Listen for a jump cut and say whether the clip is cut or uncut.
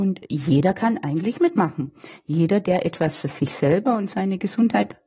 uncut